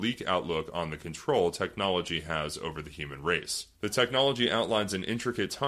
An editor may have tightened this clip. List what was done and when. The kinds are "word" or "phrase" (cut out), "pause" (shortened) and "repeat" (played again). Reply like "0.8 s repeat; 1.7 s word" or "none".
3.7 s pause